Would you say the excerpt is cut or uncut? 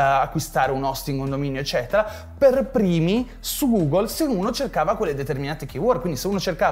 uncut